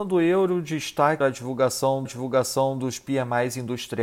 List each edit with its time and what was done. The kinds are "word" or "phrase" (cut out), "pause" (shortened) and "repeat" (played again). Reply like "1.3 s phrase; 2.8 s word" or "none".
1.2 s word; 2.1 s repeat